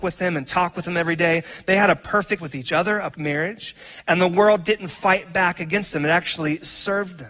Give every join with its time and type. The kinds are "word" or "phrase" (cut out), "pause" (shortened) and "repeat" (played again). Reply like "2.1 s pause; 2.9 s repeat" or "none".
2.4 s word; 3.1 s word